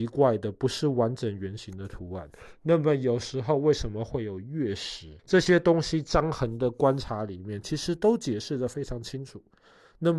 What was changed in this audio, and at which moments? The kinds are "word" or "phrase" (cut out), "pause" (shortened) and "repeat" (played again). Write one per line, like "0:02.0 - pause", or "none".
0:05.2 - pause